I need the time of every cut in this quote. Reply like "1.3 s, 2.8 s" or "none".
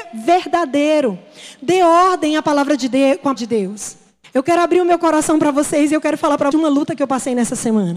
3.4 s, 4.2 s, 6.5 s